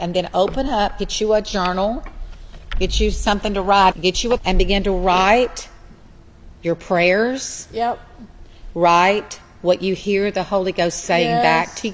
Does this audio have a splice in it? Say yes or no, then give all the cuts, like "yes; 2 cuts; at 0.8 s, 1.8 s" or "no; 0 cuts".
yes; 3 cuts; at 3.9 s, 4.4 s, 6.6 s